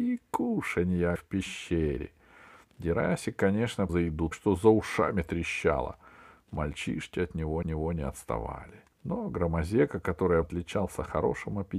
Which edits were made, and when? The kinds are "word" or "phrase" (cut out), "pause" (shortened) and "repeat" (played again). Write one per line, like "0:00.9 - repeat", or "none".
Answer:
0:01.2 - phrase
0:03.9 - word
0:04.3 - word
0:07.6 - repeat
0:08.9 - pause
0:10.4 - word

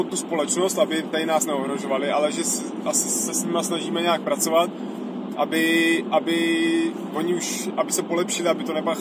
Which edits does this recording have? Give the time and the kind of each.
none

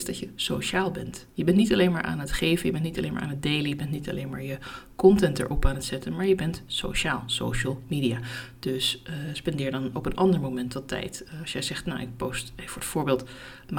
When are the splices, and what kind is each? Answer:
0:01.3 - pause

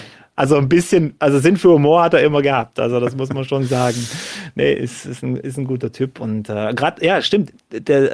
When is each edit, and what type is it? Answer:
none

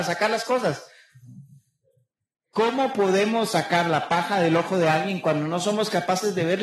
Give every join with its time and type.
none

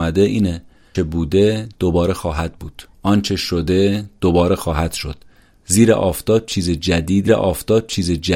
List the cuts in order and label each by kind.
0:00.9 - word
0:07.3 - repeat

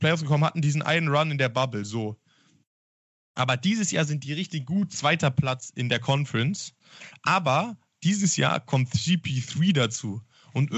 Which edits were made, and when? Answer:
none

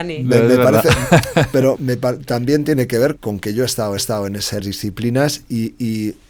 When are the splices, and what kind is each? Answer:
0:01.8 - word
0:03.2 - word
0:04.0 - repeat
0:04.6 - phrase

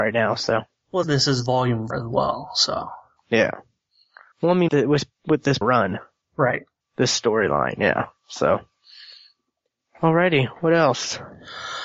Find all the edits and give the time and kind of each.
0:01.0 - word
0:01.9 - word
0:04.7 - word
0:05.6 - word

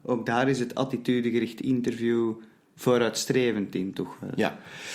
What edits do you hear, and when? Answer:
none

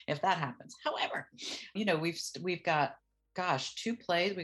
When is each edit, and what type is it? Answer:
0:01.8 - word

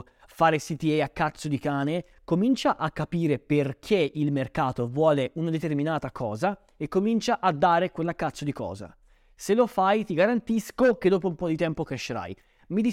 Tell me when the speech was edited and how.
none

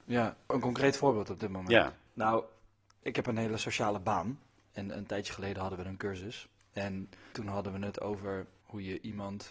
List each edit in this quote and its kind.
none

